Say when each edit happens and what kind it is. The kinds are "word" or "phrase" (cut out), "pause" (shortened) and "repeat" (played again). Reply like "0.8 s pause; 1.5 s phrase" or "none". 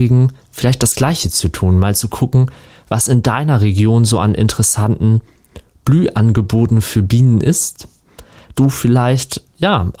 8.5 s word